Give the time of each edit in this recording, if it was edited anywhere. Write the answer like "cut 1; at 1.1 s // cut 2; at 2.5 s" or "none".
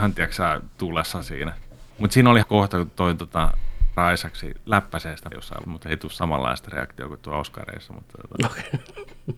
cut 1; at 1.9 s // cut 2; at 2.4 s // cut 3; at 4.0 s // cut 4; at 5.3 s // cut 5; at 5.6 s